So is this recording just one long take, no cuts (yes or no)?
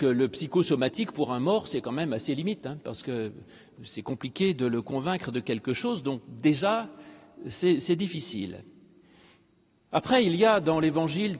yes